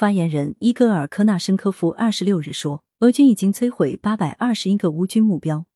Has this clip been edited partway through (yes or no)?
yes